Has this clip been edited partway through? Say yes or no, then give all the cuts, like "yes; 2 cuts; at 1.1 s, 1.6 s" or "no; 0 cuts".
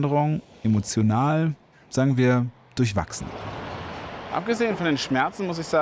no; 0 cuts